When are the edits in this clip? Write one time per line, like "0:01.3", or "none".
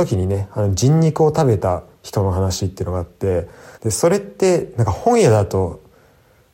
0:03.7